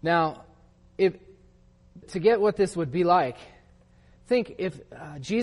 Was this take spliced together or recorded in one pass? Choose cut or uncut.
cut